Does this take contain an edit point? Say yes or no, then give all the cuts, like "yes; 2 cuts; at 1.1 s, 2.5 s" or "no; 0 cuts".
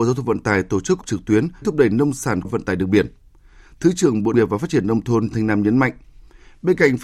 yes; 5 cuts; at 1.0 s, 1.6 s, 2.4 s, 4.3 s, 5.3 s